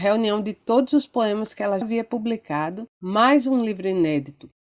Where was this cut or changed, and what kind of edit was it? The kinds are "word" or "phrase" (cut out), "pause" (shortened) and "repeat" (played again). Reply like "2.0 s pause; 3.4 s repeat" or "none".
1.8 s word; 2.9 s pause